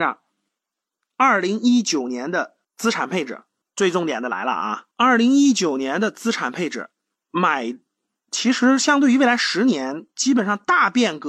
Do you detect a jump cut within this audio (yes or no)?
yes